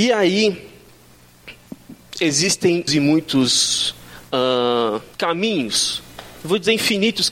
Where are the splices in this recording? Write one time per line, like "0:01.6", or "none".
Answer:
0:02.9
0:05.1

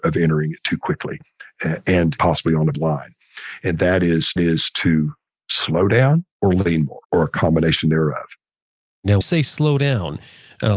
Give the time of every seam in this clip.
0:02.2
0:02.7
0:04.4
0:06.3
0:07.0
0:09.2

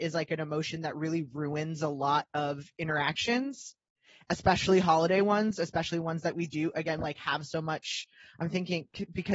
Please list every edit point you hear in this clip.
none

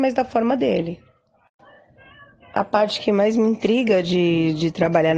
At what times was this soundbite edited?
none

